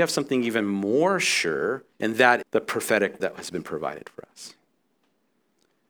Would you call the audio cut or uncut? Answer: cut